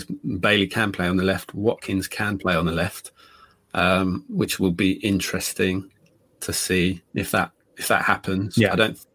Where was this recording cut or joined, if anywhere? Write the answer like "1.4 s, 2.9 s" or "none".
none